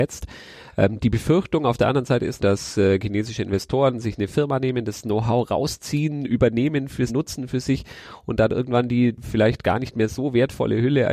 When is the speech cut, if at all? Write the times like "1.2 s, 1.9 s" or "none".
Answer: 2.4 s, 7.1 s